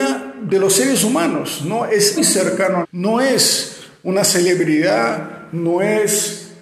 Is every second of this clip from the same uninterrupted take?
no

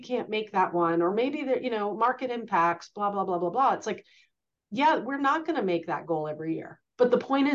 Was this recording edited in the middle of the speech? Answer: no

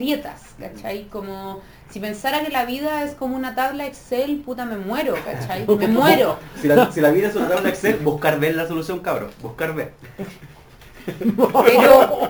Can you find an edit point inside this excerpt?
no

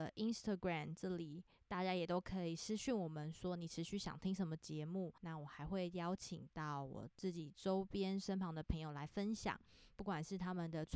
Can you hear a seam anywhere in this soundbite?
yes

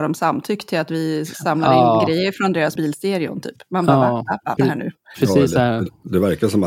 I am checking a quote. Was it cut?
yes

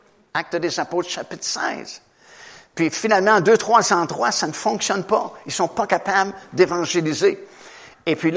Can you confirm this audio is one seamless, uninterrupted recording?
yes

